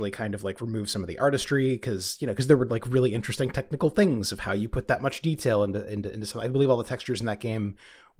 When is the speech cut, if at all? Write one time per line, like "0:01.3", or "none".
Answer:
none